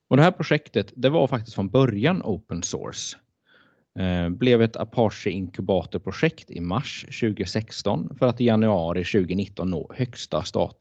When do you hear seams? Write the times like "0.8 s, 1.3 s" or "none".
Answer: none